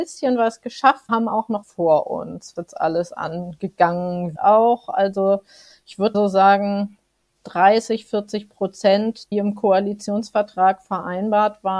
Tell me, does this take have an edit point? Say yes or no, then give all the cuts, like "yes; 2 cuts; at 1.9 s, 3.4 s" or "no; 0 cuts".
yes; 6 cuts; at 1.1 s, 1.6 s, 2.6 s, 4.4 s, 6.1 s, 9.3 s